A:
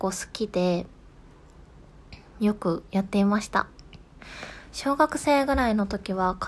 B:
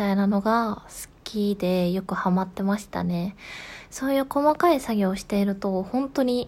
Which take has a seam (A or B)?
A